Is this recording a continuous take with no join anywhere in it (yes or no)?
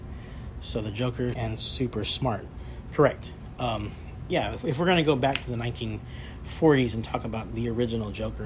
no